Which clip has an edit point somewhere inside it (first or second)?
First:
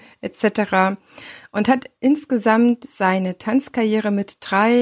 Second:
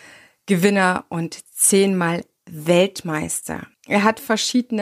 second